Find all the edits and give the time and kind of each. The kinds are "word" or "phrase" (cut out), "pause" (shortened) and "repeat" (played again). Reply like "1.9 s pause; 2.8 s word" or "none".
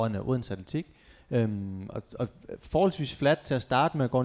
none